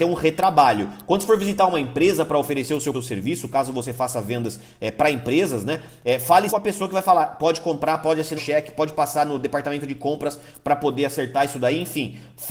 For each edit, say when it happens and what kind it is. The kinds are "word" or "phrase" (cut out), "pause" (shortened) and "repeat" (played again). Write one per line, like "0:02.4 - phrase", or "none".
0:02.9 - phrase
0:06.5 - word
0:08.4 - word